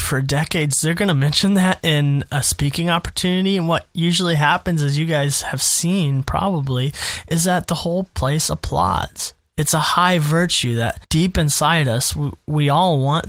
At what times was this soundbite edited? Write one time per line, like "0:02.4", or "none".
0:11.0

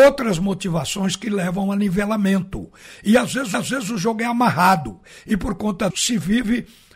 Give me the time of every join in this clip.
0:03.5
0:05.9

